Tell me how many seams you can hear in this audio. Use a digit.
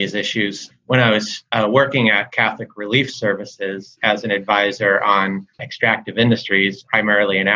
1